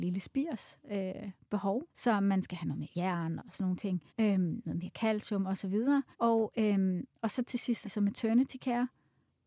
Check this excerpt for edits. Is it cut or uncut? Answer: cut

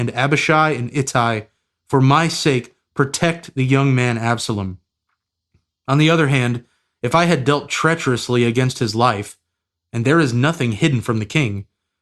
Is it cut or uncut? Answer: uncut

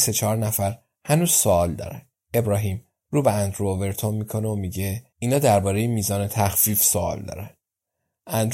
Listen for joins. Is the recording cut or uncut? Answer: cut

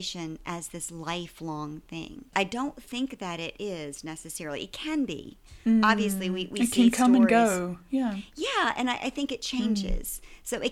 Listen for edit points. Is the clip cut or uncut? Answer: uncut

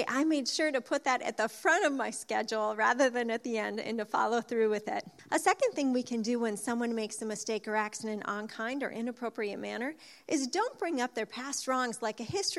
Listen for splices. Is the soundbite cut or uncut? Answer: uncut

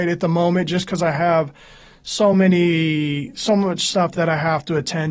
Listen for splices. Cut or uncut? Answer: uncut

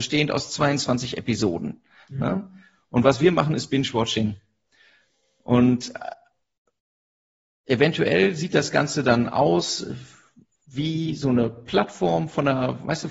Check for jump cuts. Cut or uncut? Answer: uncut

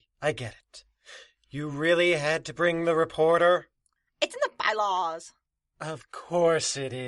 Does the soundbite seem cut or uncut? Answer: uncut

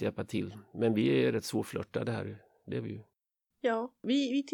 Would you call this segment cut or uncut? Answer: uncut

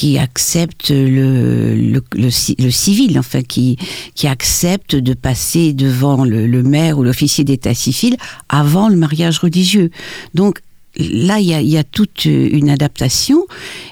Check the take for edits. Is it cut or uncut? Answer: uncut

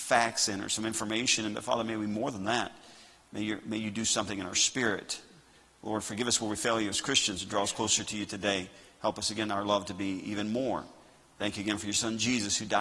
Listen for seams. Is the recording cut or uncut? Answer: uncut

